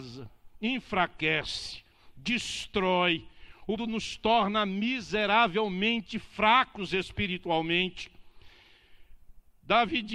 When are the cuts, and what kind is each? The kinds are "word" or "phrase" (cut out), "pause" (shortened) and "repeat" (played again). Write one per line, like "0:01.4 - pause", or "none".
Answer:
0:03.8 - word